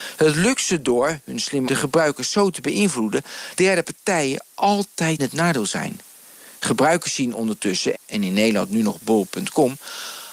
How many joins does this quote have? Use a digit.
4